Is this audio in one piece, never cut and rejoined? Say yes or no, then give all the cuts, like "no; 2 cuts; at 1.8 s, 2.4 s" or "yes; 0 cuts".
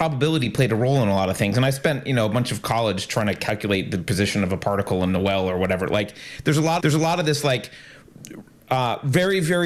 no; 1 cut; at 6.8 s